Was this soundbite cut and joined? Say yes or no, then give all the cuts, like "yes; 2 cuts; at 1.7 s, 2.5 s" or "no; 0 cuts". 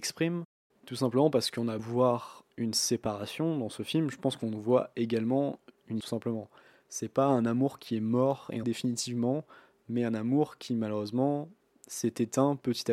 yes; 4 cuts; at 1.8 s, 2.5 s, 6.0 s, 8.6 s